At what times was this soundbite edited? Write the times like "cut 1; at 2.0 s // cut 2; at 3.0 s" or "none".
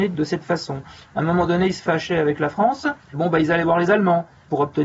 cut 1; at 3.0 s